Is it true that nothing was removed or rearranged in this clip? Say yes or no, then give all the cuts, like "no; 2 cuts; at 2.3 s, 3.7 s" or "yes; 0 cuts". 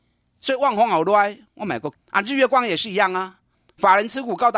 no; 1 cut; at 2.0 s